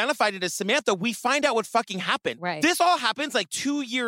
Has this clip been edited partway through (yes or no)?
no